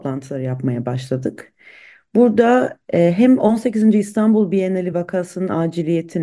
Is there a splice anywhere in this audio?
no; 0 cuts

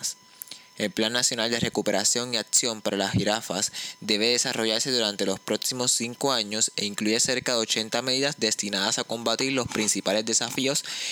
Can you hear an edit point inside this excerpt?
no; 0 cuts

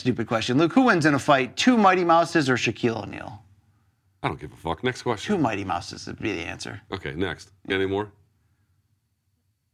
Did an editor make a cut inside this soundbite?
no; 0 cuts

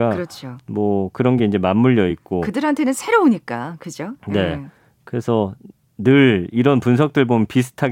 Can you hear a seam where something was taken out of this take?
no; 0 cuts

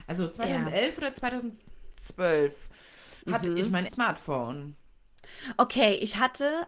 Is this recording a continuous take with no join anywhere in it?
no; 2 cuts; at 3.2 s, 3.9 s

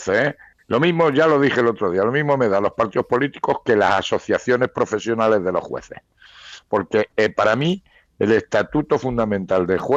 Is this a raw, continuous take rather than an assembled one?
yes; 0 cuts

